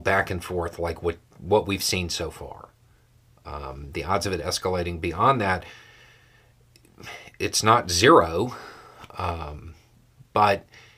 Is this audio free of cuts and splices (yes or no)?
yes